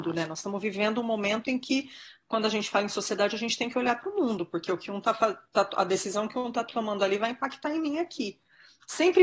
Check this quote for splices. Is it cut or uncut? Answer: uncut